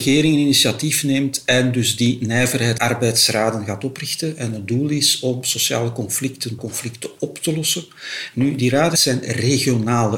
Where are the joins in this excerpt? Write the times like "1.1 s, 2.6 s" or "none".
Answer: 2.8 s, 6.6 s

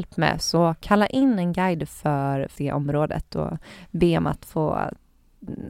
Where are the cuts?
2.6 s

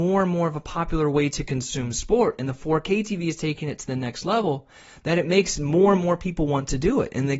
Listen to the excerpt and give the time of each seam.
none

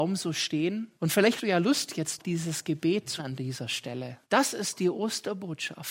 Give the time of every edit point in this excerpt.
1.0 s, 1.4 s, 2.2 s, 3.2 s, 4.2 s

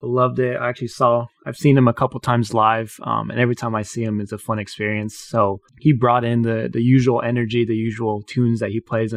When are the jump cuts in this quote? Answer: 4.3 s, 5.7 s

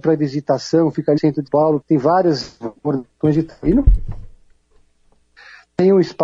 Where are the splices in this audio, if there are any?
1.2 s, 1.5 s, 1.8 s

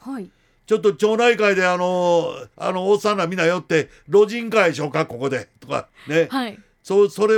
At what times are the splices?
2.5 s

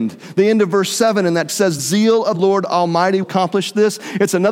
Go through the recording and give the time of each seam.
1.5 s, 1.8 s, 2.3 s, 3.2 s

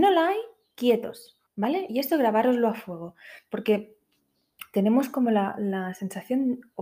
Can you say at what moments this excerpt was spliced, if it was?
1.5 s

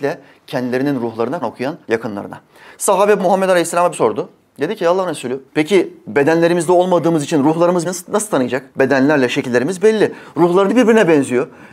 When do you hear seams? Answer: 1.4 s, 1.8 s, 3.2 s, 3.9 s, 5.5 s, 7.8 s, 8.7 s, 10.7 s

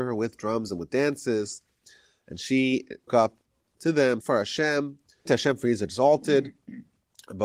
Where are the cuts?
3.1 s, 4.2 s, 5.3 s

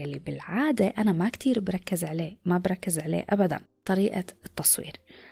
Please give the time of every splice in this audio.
none

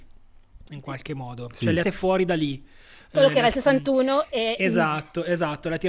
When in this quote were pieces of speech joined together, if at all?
1.8 s

